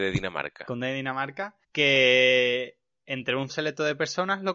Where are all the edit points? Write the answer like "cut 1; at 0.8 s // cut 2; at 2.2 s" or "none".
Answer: cut 1; at 1.6 s // cut 2; at 3.5 s